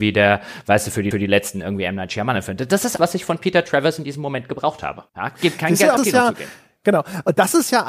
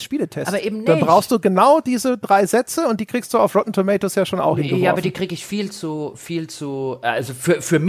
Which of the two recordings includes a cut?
first; 4 cuts; at 1.1 s, 3.0 s, 5.1 s, 6.0 s

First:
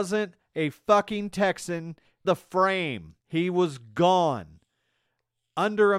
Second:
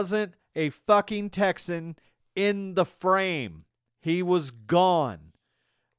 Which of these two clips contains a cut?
first; 2 cuts; at 2.2 s, 3.2 s

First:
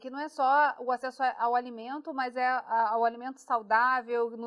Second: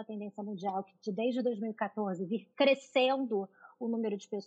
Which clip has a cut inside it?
second; 1 cut; at 2.5 s

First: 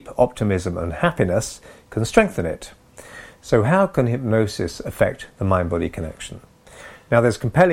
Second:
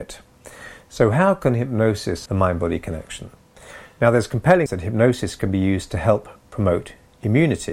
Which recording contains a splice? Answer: second; 2 cuts; at 2.3 s, 4.7 s

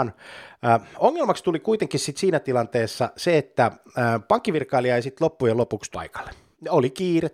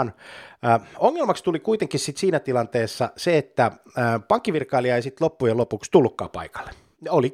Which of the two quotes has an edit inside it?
first; 1 cut; at 5.9 s

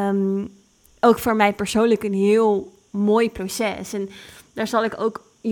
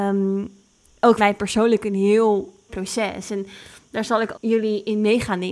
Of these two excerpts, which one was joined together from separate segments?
second; 3 cuts; at 1.2 s, 2.7 s, 4.3 s

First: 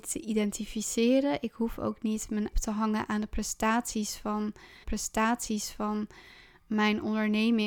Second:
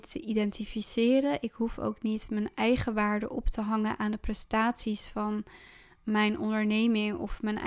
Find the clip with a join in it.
first; 2 cuts; at 2.5 s, 4.8 s

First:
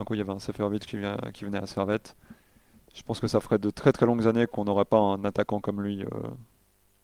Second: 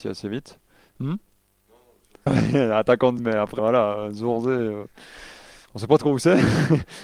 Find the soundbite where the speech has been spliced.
second; 3 cuts; at 2.3 s, 3.2 s, 3.6 s

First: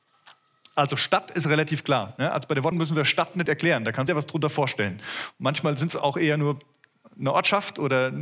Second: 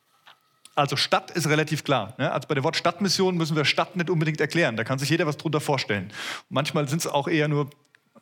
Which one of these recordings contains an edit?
first; 3 cuts; at 2.7 s, 3.5 s, 4.1 s

